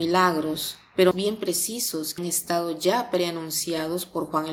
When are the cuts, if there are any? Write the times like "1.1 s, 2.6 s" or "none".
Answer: 1.1 s, 2.2 s